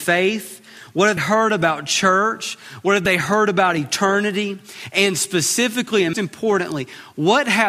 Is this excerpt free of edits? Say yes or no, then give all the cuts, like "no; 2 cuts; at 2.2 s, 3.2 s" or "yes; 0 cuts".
no; 2 cuts; at 1.2 s, 6.1 s